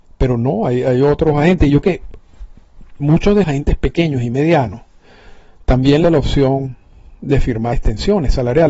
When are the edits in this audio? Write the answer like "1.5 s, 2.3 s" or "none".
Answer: 1.8 s, 3.4 s, 6.0 s, 7.7 s